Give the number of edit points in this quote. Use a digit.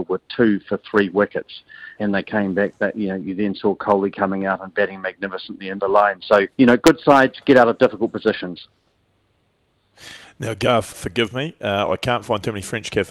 4